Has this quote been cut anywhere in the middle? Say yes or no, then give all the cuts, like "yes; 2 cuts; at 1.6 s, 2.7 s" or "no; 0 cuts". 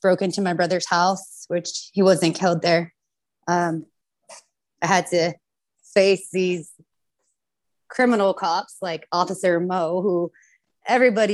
no; 0 cuts